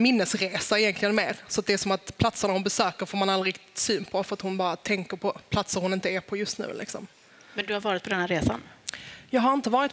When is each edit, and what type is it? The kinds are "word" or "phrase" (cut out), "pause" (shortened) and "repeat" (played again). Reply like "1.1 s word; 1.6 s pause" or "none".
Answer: none